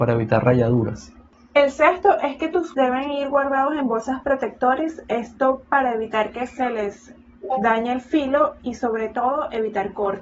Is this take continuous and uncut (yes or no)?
no